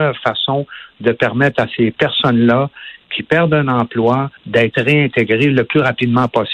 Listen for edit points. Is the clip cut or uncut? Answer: cut